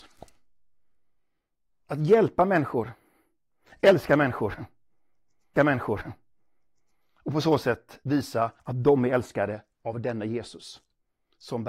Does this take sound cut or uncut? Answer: cut